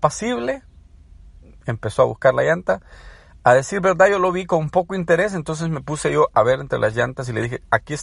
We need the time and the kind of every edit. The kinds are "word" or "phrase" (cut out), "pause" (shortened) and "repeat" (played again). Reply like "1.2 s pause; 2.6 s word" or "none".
none

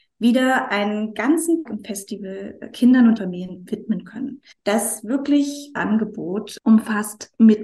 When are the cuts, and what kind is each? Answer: 1.7 s word; 3.2 s word; 4.5 s pause; 5.8 s word; 6.6 s pause

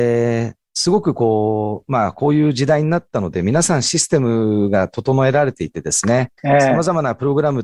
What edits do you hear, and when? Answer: 6.4 s pause

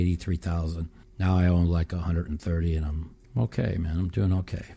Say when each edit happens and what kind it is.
1.0 s pause; 3.2 s pause

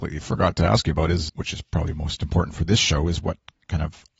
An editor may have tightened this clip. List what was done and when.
1.3 s word

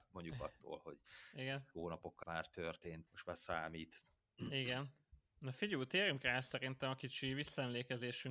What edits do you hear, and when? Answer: 2.2 s word; 3.1 s word

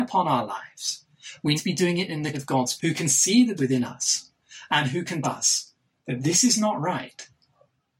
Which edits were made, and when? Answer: 1.6 s word; 2.3 s word; 2.8 s word; 3.6 s word; 5.2 s word; 6.0 s word

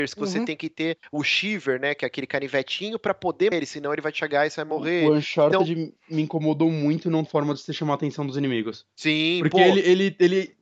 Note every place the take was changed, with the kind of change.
3.5 s word; 7.3 s phrase

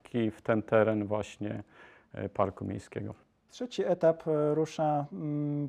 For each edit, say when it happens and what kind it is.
3.2 s pause

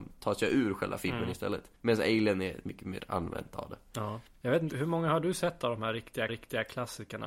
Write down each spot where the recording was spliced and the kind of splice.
1.8 s pause; 3.0 s word; 4.3 s pause; 4.7 s word; 6.3 s repeat

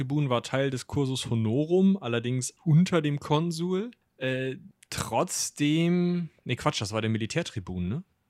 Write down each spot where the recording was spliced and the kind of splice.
2.6 s word

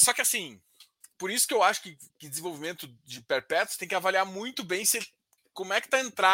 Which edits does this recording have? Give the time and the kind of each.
1.0 s pause; 2.1 s pause

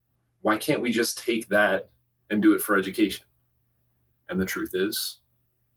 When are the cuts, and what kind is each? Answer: none

